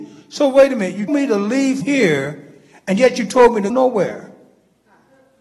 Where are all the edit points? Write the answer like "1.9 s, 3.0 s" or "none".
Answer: 1.1 s, 1.8 s, 3.7 s